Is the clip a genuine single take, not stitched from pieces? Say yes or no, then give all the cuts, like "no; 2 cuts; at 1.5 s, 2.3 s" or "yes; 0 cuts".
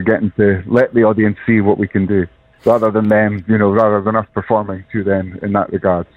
yes; 0 cuts